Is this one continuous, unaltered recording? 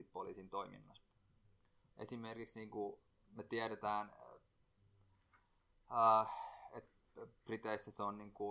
yes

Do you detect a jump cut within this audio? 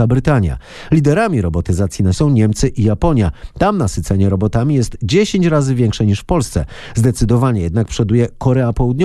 yes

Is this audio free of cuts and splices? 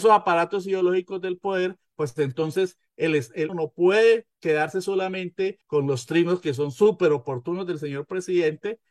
no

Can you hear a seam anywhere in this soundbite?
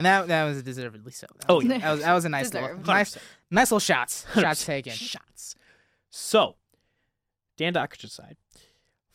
no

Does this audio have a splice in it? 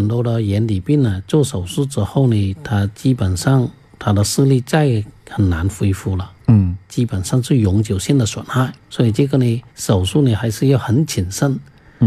yes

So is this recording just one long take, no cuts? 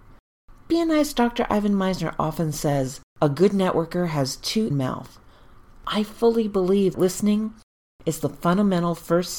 no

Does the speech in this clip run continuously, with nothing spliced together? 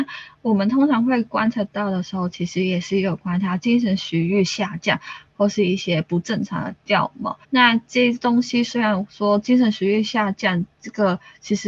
no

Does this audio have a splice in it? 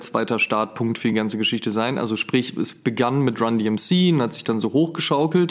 no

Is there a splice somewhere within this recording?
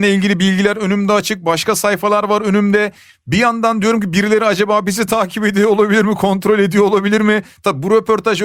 no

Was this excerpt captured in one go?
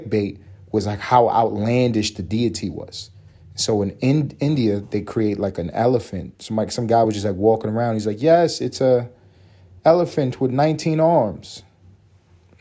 yes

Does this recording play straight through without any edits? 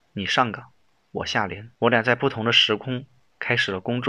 no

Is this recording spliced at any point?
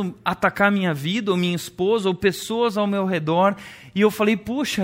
no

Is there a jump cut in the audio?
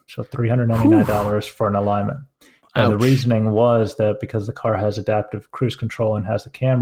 no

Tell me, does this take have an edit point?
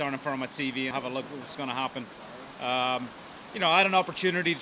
yes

